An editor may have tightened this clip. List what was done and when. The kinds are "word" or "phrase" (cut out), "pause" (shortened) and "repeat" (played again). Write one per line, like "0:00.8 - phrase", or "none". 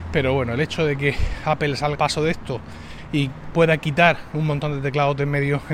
0:02.0 - word